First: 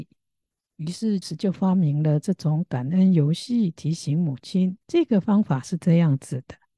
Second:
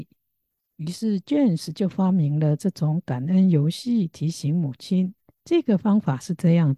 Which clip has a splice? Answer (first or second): first